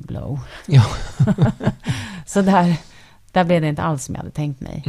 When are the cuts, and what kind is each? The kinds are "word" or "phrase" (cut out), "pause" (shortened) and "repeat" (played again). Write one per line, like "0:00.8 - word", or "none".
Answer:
none